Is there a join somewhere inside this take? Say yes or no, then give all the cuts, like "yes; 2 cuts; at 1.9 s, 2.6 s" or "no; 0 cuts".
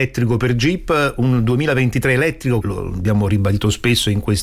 yes; 1 cut; at 2.6 s